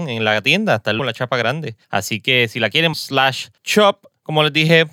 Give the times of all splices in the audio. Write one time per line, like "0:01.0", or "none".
0:01.0
0:01.8
0:02.9
0:03.6